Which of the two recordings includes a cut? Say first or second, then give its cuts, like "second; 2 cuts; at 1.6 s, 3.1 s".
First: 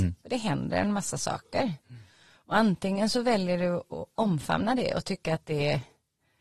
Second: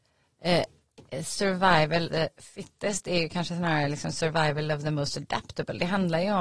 second; 1 cut; at 2.1 s